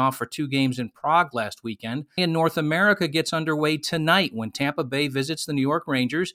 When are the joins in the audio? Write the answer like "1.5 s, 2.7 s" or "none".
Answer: 2.2 s